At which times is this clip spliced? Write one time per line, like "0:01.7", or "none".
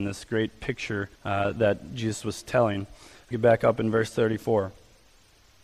0:01.2
0:03.3